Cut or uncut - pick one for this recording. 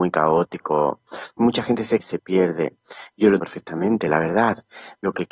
cut